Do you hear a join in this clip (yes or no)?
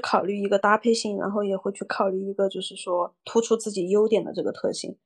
yes